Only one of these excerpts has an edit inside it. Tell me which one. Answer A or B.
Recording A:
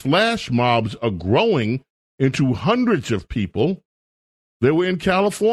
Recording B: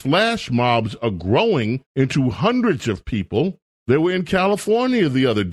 B